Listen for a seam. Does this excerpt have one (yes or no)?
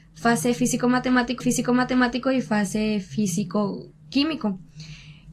yes